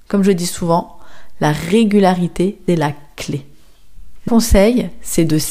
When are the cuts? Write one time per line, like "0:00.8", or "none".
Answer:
0:02.7
0:04.3